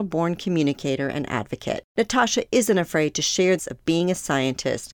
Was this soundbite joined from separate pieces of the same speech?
yes; 2 cuts; at 1.9 s, 3.6 s

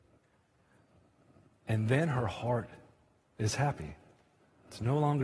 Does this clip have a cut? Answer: no; 0 cuts

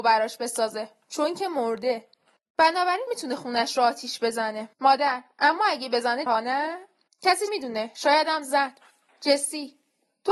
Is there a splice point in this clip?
yes; 4 cuts; at 3.1 s, 4.7 s, 6.3 s, 7.5 s

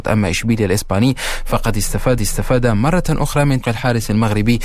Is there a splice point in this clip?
yes; 2 cuts; at 2.2 s, 3.6 s

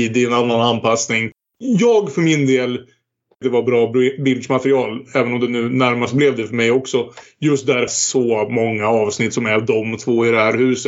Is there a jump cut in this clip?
yes; 2 cuts; at 3.4 s, 7.9 s

